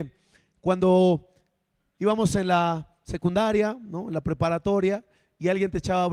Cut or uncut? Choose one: uncut